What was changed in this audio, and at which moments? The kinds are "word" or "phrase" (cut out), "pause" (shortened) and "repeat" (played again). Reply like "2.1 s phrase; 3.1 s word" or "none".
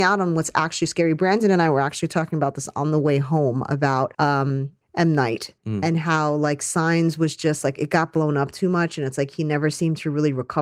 4.1 s pause; 5.6 s pause